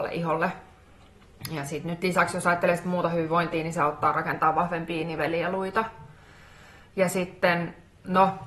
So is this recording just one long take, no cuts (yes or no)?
yes